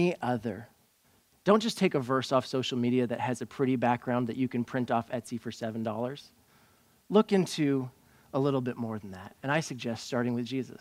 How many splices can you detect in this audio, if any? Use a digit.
0